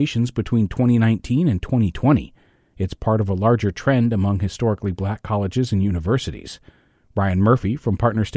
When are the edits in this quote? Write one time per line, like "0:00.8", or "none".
none